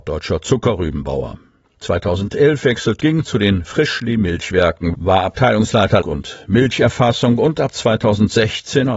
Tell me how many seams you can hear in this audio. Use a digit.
3